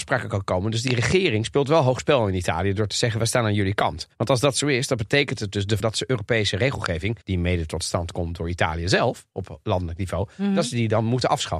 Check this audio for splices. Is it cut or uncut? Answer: cut